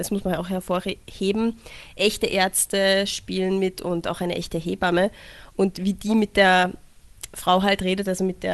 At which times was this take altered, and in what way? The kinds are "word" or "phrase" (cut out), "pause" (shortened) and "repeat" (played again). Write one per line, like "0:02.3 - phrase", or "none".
none